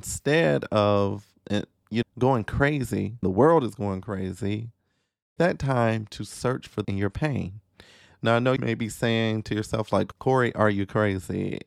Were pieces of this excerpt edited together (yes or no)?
yes